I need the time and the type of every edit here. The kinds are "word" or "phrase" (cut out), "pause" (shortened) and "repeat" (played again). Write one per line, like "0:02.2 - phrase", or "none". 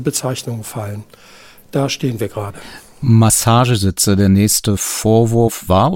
none